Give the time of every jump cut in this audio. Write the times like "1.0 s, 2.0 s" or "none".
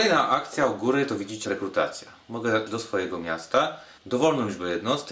1.4 s, 2.7 s, 4.0 s